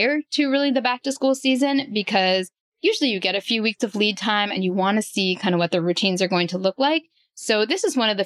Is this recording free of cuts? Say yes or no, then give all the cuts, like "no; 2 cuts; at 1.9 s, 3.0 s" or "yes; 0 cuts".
yes; 0 cuts